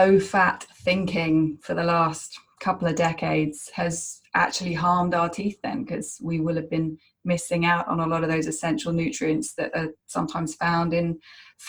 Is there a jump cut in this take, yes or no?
no